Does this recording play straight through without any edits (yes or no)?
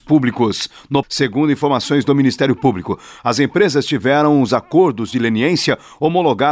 no